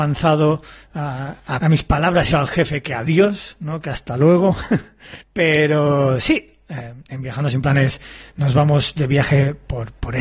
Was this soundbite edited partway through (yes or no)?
yes